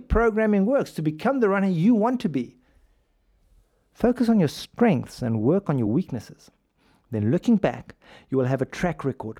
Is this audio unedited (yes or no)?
yes